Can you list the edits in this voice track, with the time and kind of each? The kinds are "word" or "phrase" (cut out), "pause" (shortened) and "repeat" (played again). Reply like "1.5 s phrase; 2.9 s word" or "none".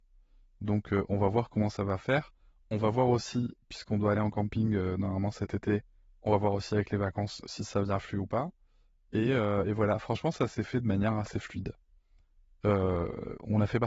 none